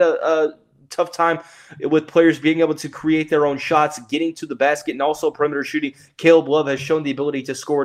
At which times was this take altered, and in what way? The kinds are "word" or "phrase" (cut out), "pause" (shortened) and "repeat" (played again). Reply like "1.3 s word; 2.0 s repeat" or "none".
none